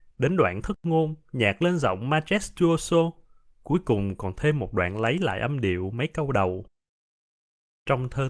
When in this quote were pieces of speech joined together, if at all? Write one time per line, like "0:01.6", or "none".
none